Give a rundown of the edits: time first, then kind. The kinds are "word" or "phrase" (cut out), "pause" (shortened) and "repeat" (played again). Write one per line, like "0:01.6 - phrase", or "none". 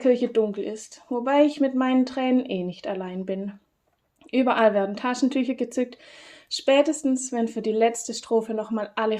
none

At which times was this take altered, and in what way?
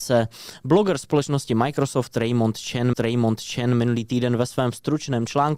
0:02.9 - repeat

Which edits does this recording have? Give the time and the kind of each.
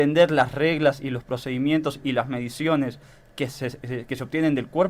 none

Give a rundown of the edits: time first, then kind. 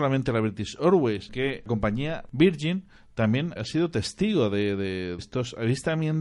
0:01.3 - word
0:01.7 - word
0:03.6 - word
0:05.2 - word

